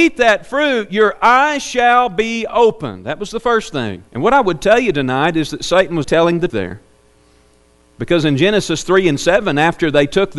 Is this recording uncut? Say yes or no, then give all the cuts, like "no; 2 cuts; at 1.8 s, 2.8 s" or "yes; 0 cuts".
no; 3 cuts; at 4.1 s, 6.0 s, 6.5 s